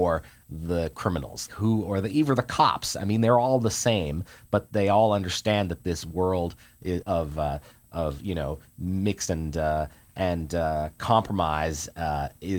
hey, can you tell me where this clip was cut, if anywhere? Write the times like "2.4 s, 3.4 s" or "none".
1.5 s, 7.0 s, 9.3 s